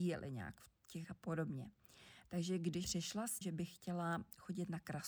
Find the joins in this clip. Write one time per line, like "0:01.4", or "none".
0:01.0
0:02.8
0:03.4